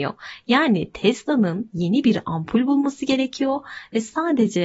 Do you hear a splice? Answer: no; 0 cuts

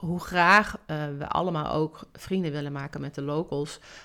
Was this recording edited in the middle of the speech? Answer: no; 0 cuts

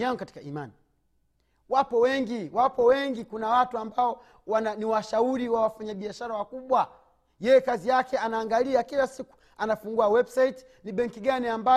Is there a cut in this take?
no; 0 cuts

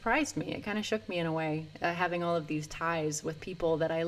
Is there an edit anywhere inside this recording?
no; 0 cuts

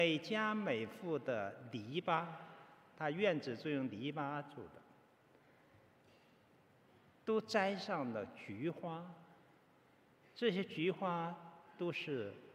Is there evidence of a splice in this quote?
no; 0 cuts

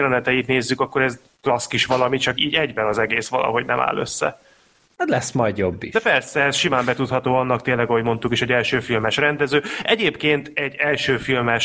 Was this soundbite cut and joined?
yes; 2 cuts; at 1.3 s, 2.4 s

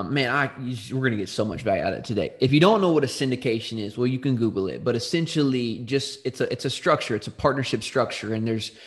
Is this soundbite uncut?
yes; 0 cuts

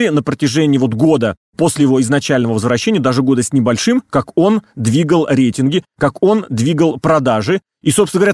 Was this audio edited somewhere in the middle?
no; 0 cuts

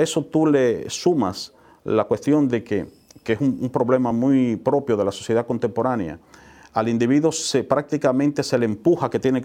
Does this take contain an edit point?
no; 0 cuts

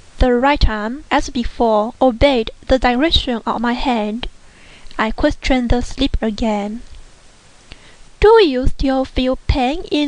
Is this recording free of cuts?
no; 1 cut; at 6.2 s

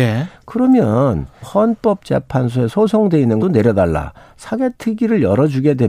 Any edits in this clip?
yes; 2 cuts; at 1.4 s, 3.4 s

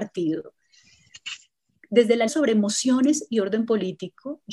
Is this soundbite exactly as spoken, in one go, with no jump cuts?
no; 1 cut; at 2.3 s

